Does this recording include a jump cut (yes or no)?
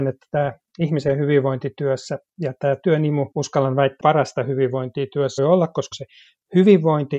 yes